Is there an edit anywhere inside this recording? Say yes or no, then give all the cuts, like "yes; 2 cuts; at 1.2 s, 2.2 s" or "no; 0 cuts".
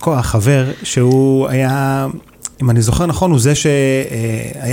yes; 1 cut; at 2.5 s